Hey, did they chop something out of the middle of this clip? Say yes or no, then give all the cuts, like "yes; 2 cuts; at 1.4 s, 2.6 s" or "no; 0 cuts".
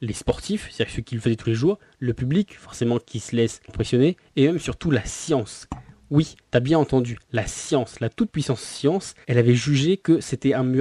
yes; 3 cuts; at 3.7 s, 6.4 s, 9.2 s